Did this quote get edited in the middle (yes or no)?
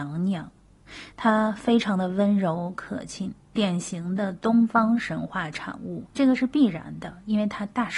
yes